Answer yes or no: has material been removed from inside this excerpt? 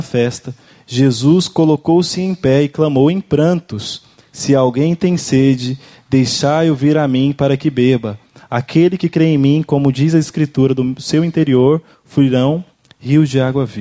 no